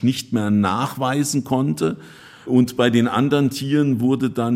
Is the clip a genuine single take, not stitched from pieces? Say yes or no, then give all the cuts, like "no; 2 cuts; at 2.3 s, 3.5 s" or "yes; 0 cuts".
yes; 0 cuts